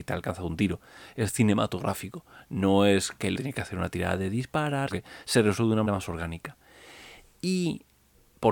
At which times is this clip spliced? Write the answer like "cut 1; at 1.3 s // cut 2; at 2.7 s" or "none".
cut 1; at 3.4 s // cut 2; at 4.9 s // cut 3; at 5.9 s